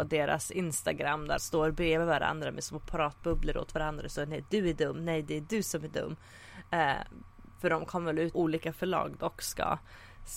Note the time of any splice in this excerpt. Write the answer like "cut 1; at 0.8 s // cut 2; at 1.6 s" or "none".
cut 1; at 1.4 s // cut 2; at 8.3 s